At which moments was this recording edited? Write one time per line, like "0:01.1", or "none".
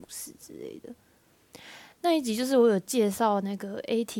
0:01.9